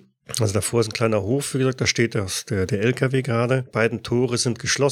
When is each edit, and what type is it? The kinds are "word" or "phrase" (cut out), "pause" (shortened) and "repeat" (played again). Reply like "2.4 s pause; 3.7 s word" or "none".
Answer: none